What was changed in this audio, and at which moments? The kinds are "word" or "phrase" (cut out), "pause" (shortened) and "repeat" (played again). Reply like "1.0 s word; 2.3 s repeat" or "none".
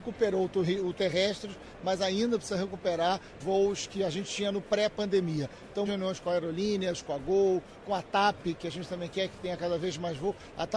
1.0 s word; 3.4 s word; 5.9 s word; 7.8 s word